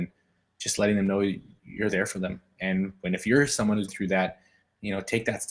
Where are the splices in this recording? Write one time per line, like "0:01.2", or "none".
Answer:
0:03.9